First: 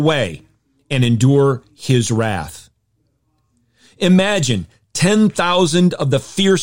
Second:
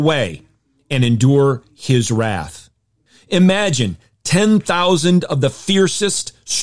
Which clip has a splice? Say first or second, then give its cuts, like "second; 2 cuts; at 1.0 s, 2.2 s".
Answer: second; 1 cut; at 3.1 s